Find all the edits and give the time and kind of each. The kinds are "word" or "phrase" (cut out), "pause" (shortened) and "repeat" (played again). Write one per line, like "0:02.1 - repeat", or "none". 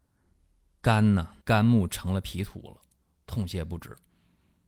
0:01.4 - pause